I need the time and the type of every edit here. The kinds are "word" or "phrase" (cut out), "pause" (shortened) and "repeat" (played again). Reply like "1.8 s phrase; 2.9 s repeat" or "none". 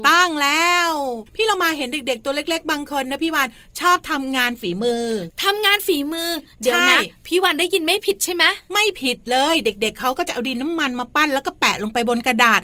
1.3 s pause